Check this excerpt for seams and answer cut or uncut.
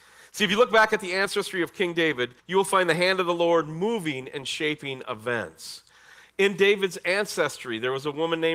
cut